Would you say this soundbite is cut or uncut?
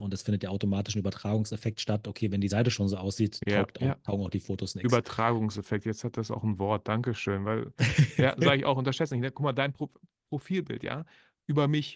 uncut